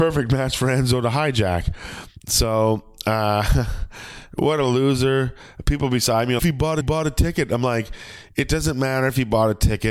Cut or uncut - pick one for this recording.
cut